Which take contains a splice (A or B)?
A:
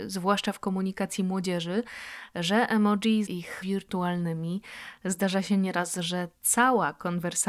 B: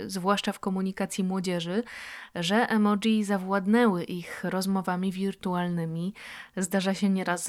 A